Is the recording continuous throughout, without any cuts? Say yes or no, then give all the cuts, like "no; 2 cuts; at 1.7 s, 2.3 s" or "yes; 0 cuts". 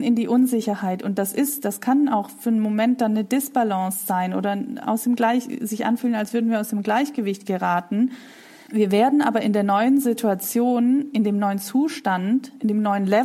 yes; 0 cuts